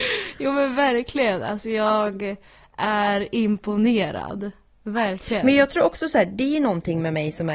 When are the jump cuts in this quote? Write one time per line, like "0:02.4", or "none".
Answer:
none

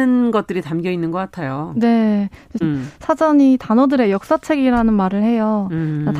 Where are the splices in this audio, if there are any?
0:02.6

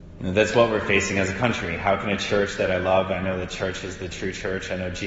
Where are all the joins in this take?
none

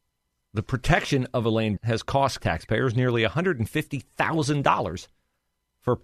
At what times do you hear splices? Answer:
0:01.8
0:02.4

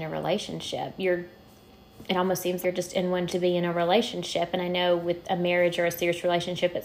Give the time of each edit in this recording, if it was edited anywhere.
0:02.6
0:03.3

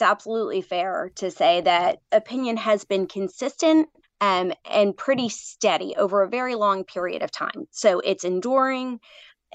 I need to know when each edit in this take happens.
0:04.0

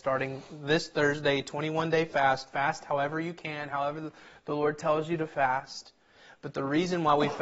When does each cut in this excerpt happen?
none

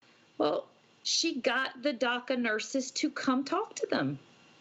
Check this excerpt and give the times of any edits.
none

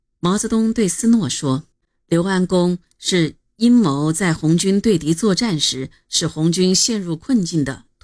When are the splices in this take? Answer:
0:01.7

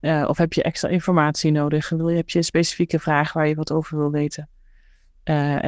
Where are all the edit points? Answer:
none

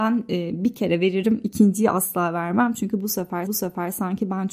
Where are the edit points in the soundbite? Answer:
0:03.5

